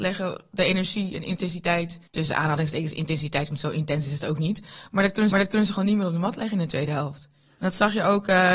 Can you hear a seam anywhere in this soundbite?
yes; 2 cuts; at 2.1 s, 5.3 s

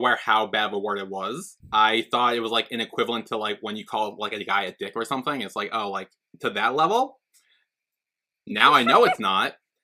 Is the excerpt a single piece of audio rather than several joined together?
yes; 0 cuts

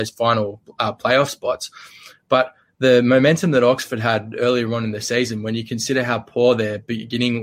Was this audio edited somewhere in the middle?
no; 0 cuts

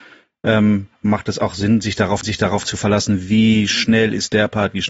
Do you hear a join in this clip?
yes; 1 cut; at 2.2 s

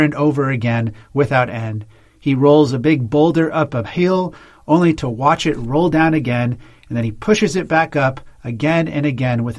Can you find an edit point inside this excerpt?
no; 0 cuts

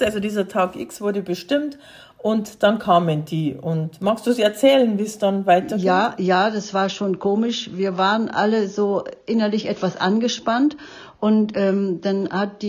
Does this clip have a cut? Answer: no; 0 cuts

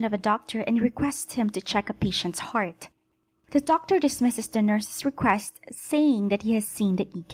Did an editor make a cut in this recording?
no; 0 cuts

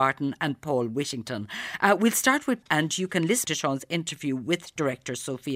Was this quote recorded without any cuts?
no; 2 cuts; at 2.6 s, 3.4 s

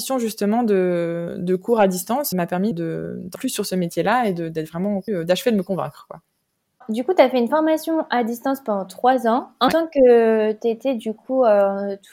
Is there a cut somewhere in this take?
yes; 5 cuts; at 2.3 s, 2.7 s, 3.4 s, 5.1 s, 9.7 s

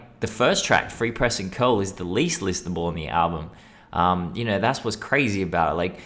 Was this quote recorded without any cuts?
yes; 0 cuts

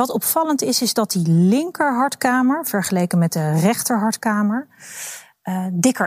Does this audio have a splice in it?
no; 0 cuts

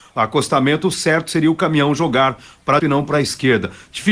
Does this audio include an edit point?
yes; 1 cut; at 2.8 s

